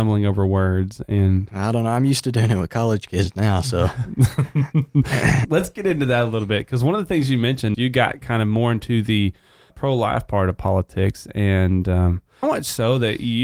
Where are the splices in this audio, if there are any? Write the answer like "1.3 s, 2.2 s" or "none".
5.4 s, 7.7 s, 9.7 s, 12.4 s